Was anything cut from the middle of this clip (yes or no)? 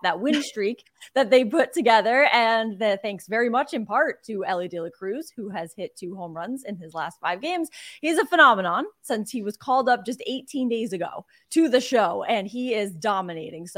no